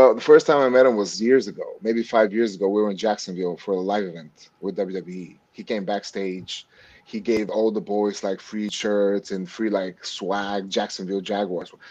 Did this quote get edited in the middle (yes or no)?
no